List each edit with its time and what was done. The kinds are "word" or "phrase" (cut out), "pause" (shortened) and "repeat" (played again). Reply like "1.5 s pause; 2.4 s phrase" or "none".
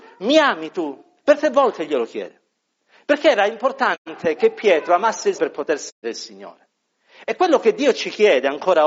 5.3 s word; 6.0 s word

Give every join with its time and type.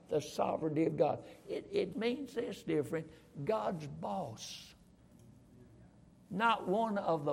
1.9 s word; 6.1 s pause

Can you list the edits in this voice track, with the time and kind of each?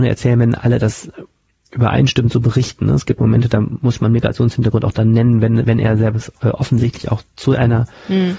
none

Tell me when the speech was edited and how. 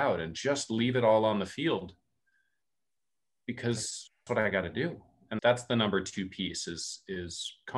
4.3 s word; 5.4 s word

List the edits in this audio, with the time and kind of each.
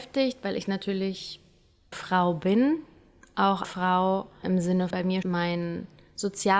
1.9 s word; 3.6 s word; 4.4 s word; 4.9 s word; 5.2 s word

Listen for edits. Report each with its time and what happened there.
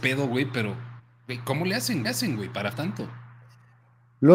1.0 s pause; 2.0 s repeat; 2.7 s word

